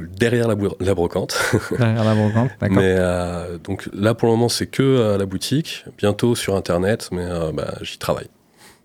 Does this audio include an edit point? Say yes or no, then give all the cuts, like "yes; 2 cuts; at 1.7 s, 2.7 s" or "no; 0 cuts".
no; 0 cuts